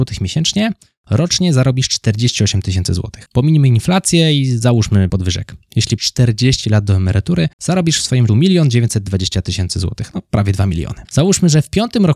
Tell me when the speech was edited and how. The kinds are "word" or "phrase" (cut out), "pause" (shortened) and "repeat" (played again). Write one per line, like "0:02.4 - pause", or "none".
0:03.3 - pause
0:05.1 - word
0:06.0 - word
0:07.5 - pause
0:08.3 - word
0:11.0 - pause